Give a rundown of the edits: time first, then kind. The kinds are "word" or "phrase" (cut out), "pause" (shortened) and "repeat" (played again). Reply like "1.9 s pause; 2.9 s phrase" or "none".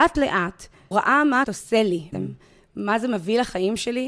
0.9 s word; 1.4 s word; 2.1 s word